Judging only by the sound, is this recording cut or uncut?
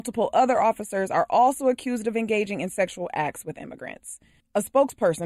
uncut